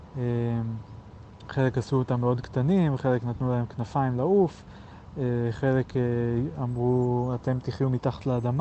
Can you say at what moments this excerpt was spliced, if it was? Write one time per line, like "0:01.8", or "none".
none